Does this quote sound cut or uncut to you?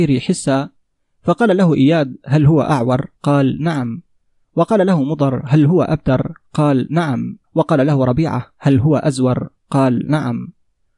cut